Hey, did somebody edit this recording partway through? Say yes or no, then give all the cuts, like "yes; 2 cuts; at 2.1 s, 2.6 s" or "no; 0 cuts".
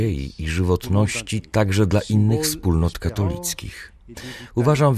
no; 0 cuts